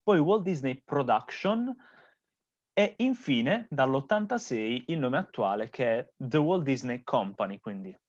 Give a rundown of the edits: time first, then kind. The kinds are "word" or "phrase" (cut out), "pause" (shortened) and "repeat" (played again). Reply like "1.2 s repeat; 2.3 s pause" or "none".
none